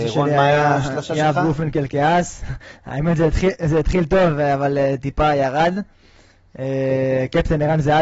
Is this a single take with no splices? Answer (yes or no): yes